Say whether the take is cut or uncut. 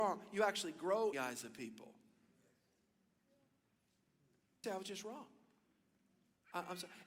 cut